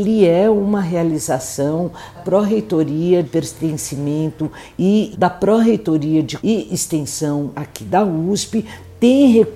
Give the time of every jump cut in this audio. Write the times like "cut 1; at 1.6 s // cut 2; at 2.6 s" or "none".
cut 1; at 2.1 s // cut 2; at 3.2 s // cut 3; at 5.1 s // cut 4; at 6.4 s // cut 5; at 7.5 s